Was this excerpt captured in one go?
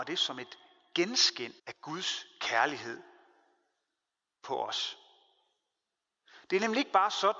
no; 1 cut; at 1.6 s

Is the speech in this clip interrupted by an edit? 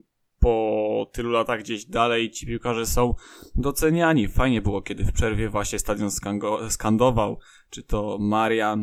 no; 0 cuts

